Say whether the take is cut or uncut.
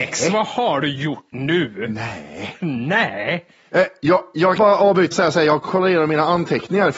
cut